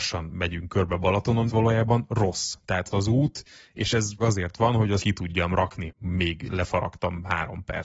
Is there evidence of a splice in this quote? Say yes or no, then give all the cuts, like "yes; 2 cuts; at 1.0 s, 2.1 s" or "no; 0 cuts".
yes; 5 cuts; at 1.5 s, 2.9 s, 4.2 s, 5.0 s, 5.9 s